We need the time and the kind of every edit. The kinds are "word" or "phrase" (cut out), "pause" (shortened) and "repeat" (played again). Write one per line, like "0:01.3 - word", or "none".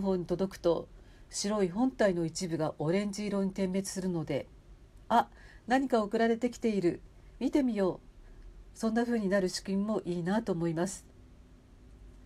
none